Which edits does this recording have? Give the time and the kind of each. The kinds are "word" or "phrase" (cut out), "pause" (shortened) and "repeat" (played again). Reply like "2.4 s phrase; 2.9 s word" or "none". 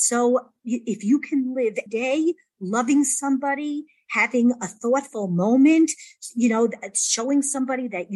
1.9 s word